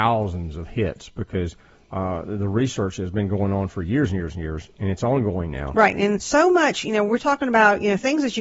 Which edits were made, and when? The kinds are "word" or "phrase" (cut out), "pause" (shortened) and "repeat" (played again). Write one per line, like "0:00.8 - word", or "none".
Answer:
0:06.2 - word